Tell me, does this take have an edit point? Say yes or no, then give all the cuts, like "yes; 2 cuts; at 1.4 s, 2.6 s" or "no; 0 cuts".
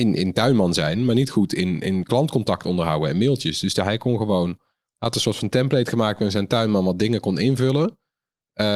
no; 0 cuts